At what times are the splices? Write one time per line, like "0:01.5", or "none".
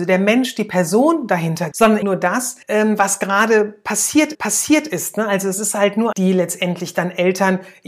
0:01.7
0:02.0
0:02.6
0:04.3
0:06.1

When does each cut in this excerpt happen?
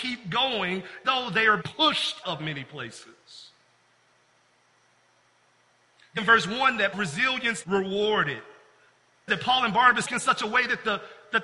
0:01.0
0:01.6
0:02.2
0:06.2
0:06.9
0:07.6
0:09.3
0:10.0

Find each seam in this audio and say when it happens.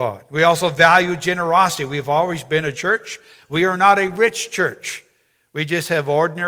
0:02.7

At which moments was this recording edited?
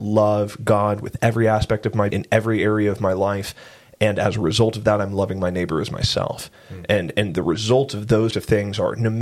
0:02.1
0:08.3

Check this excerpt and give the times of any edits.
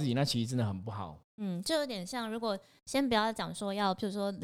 none

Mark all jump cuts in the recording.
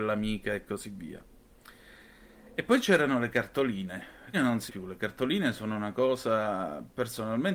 0:04.3
0:04.7

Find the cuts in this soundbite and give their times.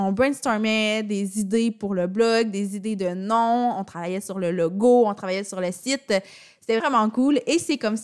0:06.8

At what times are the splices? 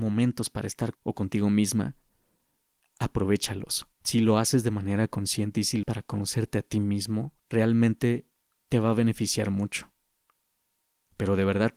0:00.9
0:03.9
0:05.8
0:07.4

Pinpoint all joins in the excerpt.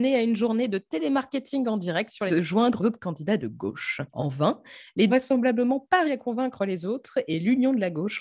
0:02.3
0:02.8
0:04.1
0:05.1
0:06.0

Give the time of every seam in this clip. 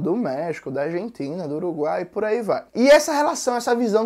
0:02.7

